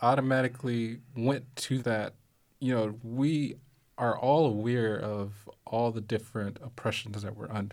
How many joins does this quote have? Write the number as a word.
one